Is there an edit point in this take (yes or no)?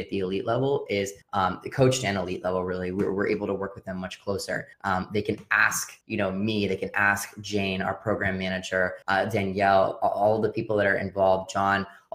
yes